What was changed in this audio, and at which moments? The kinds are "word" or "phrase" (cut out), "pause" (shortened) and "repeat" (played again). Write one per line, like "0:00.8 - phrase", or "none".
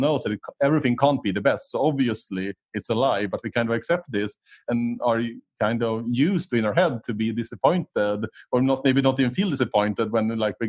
none